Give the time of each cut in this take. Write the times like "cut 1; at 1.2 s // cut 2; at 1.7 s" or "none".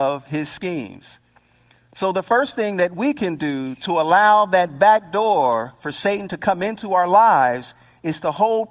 none